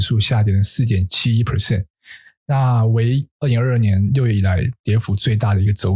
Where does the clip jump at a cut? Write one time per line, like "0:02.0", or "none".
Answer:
none